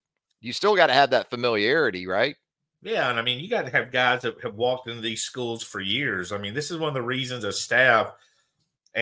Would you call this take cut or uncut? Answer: uncut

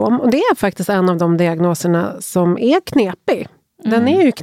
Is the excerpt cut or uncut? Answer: uncut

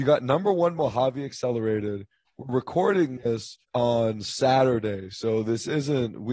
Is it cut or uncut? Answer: cut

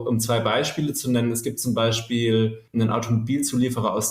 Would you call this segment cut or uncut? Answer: cut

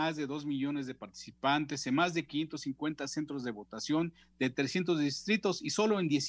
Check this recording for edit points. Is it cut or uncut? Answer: uncut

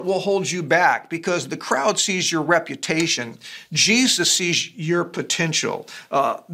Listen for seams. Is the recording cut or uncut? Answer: uncut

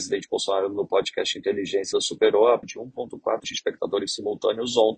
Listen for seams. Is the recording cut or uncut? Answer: cut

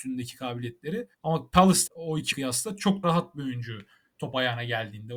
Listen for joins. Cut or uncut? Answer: cut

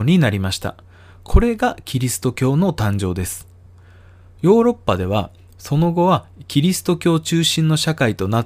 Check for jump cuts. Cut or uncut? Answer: uncut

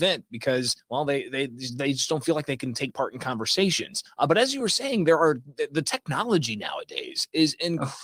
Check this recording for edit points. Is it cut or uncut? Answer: uncut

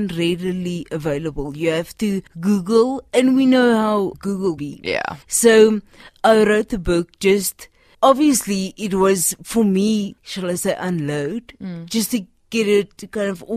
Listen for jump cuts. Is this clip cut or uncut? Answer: cut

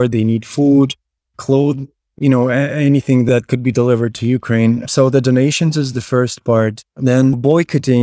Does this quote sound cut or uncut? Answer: uncut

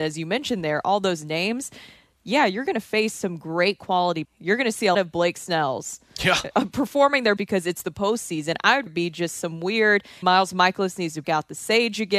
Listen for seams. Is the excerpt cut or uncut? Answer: cut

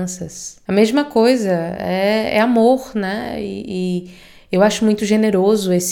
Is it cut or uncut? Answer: uncut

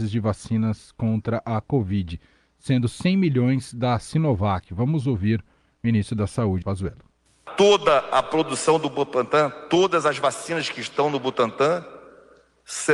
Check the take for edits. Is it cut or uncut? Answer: cut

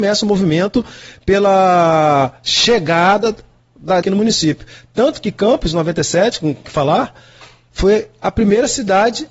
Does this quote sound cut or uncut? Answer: cut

